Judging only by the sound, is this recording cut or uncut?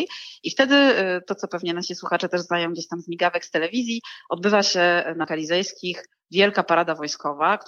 cut